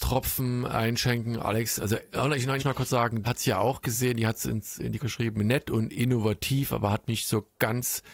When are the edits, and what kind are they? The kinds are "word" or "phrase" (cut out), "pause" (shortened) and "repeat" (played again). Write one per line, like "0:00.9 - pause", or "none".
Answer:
0:02.6 - phrase
0:03.2 - word
0:05.0 - word
0:07.1 - word